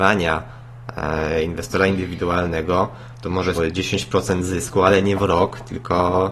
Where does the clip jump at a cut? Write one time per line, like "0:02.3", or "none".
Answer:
0:03.6